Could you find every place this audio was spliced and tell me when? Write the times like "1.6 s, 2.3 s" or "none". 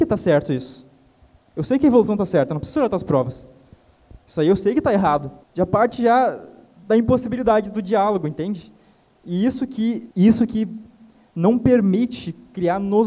5.4 s, 10.1 s